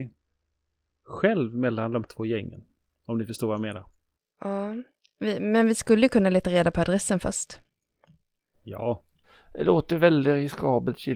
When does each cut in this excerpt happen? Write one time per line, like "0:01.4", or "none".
0:02.0